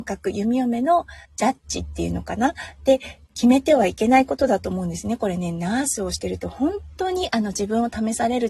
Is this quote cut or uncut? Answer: cut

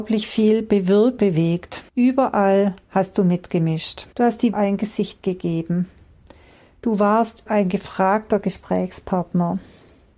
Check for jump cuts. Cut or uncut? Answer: cut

